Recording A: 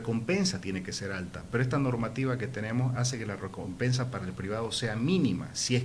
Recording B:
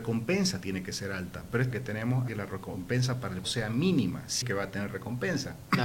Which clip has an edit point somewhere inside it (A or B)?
B